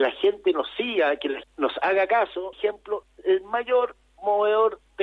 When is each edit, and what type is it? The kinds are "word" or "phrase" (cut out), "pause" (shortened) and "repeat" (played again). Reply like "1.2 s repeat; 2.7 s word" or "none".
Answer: 1.4 s word; 2.5 s word; 3.0 s word